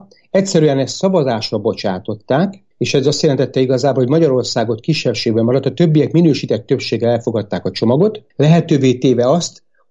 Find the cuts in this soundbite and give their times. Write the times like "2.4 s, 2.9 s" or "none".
2.7 s, 8.3 s